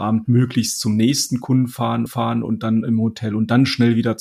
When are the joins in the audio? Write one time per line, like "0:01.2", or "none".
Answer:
0:02.1